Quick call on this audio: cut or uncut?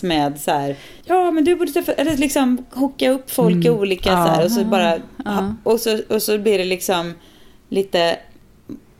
cut